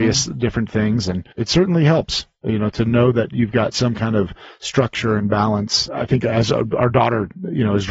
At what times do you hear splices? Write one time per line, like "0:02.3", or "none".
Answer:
0:01.3